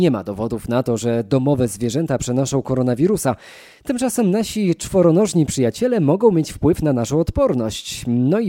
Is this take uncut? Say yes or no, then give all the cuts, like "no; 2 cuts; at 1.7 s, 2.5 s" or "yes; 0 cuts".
yes; 0 cuts